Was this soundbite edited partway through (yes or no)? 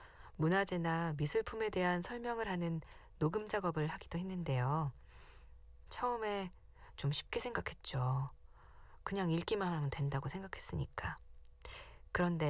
no